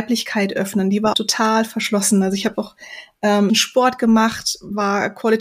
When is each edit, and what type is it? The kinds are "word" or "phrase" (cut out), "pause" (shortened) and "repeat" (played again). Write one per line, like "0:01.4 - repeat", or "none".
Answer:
0:01.1 - word
0:03.5 - phrase